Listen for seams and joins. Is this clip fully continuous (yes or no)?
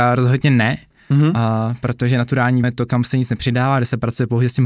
no